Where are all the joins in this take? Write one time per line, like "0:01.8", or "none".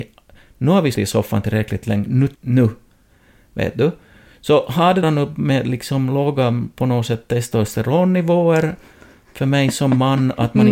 0:00.9
0:02.3
0:05.0